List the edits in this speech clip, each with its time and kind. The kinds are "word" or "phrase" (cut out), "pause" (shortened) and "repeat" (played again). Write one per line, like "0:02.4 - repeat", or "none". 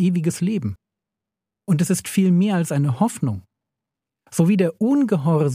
none